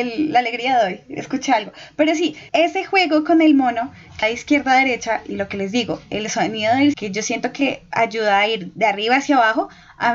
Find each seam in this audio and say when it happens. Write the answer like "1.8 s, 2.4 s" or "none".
2.5 s, 4.2 s, 6.9 s